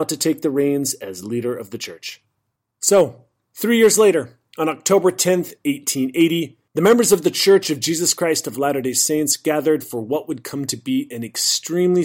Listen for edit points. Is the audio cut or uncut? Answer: cut